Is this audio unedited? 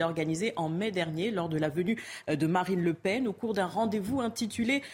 yes; 0 cuts

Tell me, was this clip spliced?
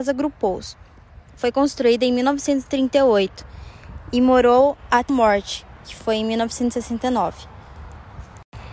yes; 3 cuts; at 1.3 s, 5.1 s, 5.8 s

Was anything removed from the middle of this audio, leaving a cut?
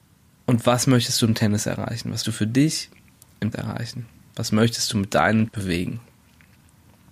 yes; 3 cuts; at 2.2 s, 3.5 s, 5.5 s

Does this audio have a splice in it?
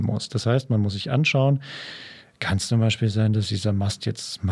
no; 0 cuts

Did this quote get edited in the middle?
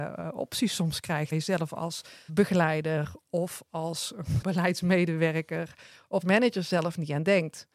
yes; 4 cuts; at 1.3 s, 2.3 s, 4.4 s, 6.2 s

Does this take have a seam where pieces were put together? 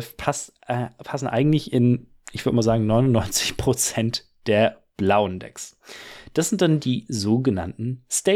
no; 0 cuts

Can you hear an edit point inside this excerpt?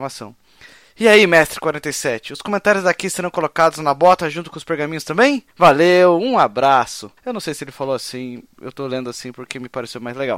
yes; 2 cuts; at 5.5 s, 7.2 s

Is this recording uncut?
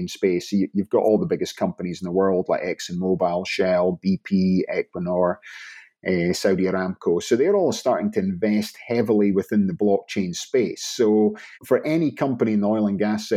no; 1 cut; at 11.5 s

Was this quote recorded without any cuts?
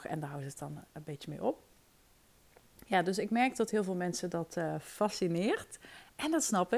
yes; 0 cuts

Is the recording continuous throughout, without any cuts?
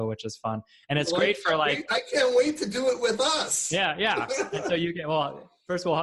no; 1 cut; at 1.9 s

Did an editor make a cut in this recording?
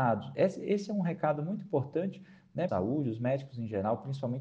yes; 1 cut; at 2.7 s

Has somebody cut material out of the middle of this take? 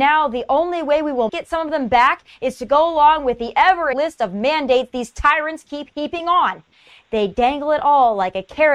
yes; 2 cuts; at 1.3 s, 3.9 s

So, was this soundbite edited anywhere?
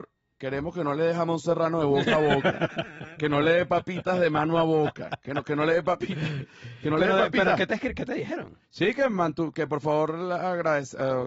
yes; 1 cut; at 8.6 s

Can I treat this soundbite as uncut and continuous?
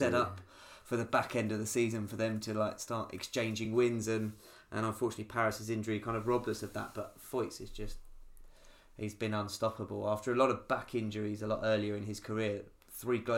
yes; 0 cuts

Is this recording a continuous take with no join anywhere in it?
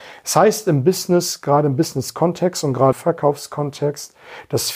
no; 1 cut; at 2.9 s

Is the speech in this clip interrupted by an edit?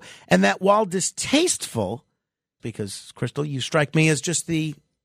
yes; 1 cut; at 2.6 s

